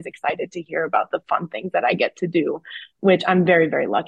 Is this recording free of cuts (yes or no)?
no